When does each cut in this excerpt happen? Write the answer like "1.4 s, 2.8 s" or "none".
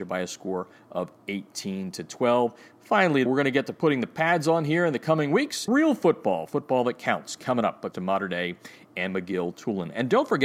3.3 s, 5.7 s, 7.9 s